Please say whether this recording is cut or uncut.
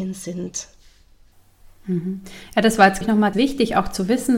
cut